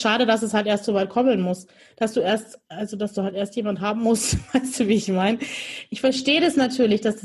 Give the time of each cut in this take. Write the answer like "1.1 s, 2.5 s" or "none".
none